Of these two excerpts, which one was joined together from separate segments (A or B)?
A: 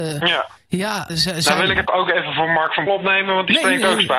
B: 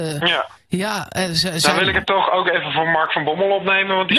A